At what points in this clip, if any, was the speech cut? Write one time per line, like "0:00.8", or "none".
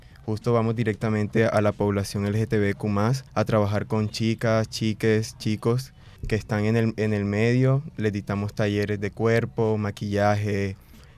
0:03.3
0:06.2